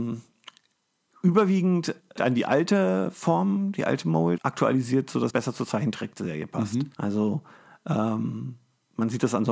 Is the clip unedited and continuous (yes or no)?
no